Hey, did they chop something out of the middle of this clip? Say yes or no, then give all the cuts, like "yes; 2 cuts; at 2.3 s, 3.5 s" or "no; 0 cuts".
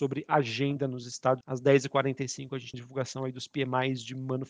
yes; 2 cuts; at 1.4 s, 2.7 s